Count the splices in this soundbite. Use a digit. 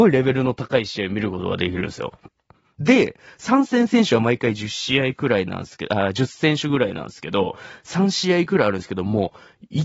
0